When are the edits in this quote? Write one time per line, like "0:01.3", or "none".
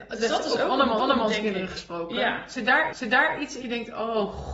0:01.0
0:02.9
0:03.6